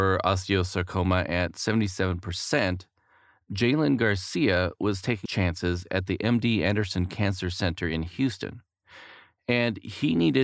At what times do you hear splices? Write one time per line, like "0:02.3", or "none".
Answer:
0:05.3